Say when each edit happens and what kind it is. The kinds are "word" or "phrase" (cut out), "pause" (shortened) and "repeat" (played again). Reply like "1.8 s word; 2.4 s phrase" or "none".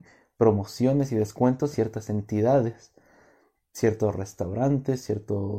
1.7 s word